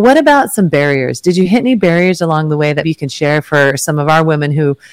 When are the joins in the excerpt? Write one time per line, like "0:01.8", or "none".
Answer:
0:02.8